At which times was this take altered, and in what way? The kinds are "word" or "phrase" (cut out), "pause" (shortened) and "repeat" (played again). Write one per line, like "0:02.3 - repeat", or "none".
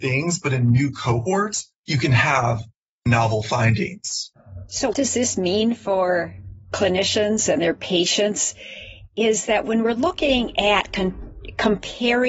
0:01.8 - pause
0:04.9 - word

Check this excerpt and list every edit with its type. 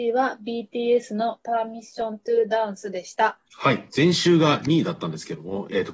0:03.5 - pause
0:03.9 - pause

